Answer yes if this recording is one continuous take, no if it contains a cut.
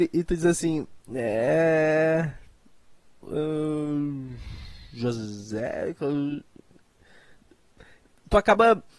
yes